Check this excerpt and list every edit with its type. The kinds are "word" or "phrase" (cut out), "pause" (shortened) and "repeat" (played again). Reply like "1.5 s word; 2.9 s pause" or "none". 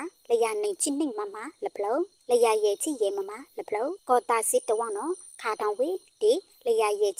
4.0 s pause